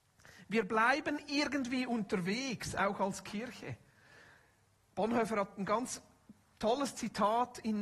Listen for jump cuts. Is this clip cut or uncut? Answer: uncut